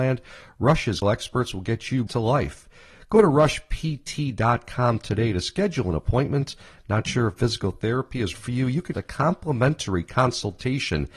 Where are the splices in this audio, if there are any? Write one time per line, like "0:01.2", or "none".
0:01.0
0:02.1
0:08.3
0:08.9

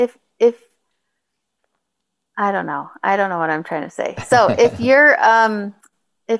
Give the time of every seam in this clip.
none

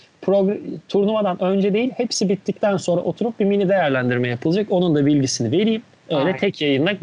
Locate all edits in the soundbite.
0:05.9

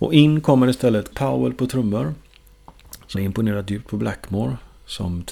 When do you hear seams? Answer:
0:01.1
0:03.1

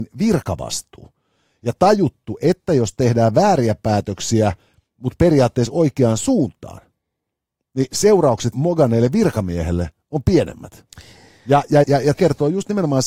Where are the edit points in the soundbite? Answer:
0:08.5
0:11.8
0:12.1

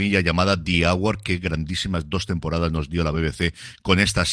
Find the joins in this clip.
none

